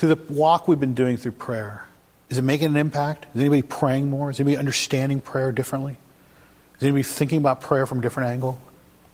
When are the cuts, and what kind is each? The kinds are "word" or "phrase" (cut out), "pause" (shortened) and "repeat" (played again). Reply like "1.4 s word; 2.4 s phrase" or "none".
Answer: 2.0 s pause